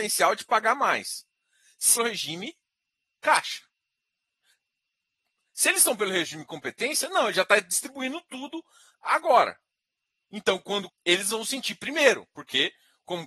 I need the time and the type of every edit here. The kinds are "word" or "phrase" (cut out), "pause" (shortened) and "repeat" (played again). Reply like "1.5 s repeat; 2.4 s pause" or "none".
2.0 s phrase; 10.9 s word